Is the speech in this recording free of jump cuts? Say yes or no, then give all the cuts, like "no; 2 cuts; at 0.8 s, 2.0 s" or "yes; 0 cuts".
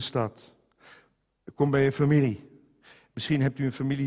yes; 0 cuts